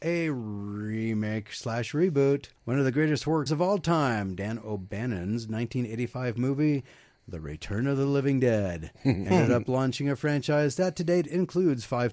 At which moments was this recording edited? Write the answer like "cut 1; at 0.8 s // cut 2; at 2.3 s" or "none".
cut 1; at 2.6 s // cut 2; at 3.5 s

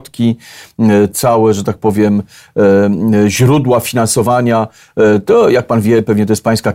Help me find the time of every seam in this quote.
cut 1; at 1.1 s

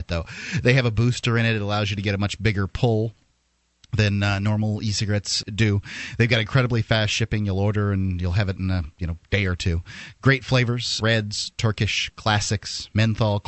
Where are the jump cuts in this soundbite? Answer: cut 1; at 5.4 s // cut 2; at 11.0 s

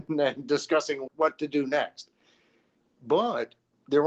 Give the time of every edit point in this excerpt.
cut 1; at 1.1 s

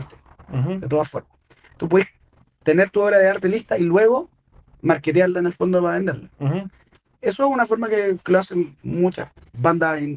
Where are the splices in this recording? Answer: cut 1; at 4.8 s

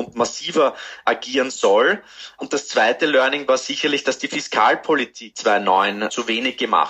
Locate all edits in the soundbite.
none

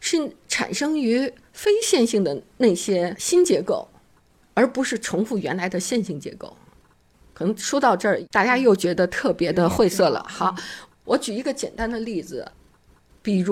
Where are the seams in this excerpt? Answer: none

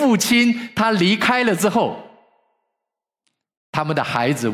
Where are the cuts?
none

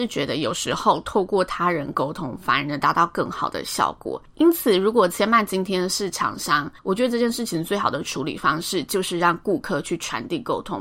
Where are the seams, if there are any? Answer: cut 1; at 4.3 s // cut 2; at 6.8 s

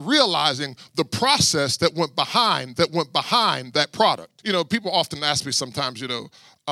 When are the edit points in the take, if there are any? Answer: cut 1; at 2.7 s // cut 2; at 4.4 s

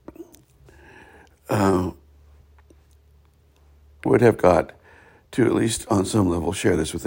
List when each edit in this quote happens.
cut 1; at 4.1 s

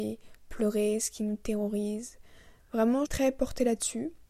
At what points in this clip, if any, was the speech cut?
cut 1; at 3.1 s

